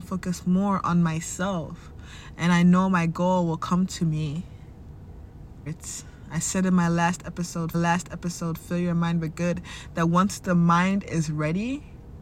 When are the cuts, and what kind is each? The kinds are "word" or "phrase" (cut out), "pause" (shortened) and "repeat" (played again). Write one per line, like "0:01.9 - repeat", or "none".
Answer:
0:05.7 - phrase
0:07.7 - repeat